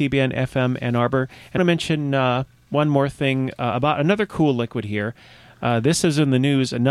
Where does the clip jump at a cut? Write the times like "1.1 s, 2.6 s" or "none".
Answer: 1.6 s